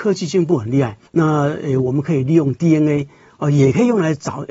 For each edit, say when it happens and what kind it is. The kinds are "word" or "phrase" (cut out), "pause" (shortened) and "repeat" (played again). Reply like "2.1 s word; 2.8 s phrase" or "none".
1.1 s pause